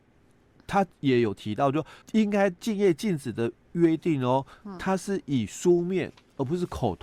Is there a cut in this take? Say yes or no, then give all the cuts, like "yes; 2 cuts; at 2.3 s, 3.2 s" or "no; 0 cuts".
yes; 1 cut; at 2.0 s